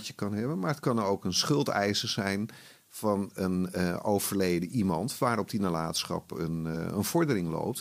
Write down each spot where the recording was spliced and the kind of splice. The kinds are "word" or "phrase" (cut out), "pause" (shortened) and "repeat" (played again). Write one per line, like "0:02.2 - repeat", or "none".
none